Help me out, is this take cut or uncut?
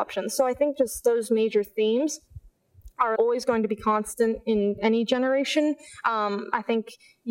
cut